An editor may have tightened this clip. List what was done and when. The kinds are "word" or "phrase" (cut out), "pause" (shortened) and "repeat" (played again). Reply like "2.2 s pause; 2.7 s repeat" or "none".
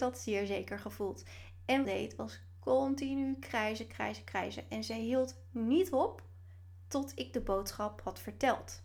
1.8 s phrase